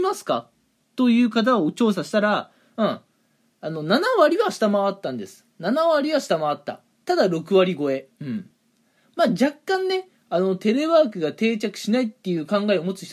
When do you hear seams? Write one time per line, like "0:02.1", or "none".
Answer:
none